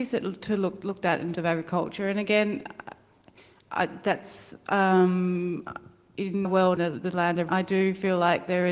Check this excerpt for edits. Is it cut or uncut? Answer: cut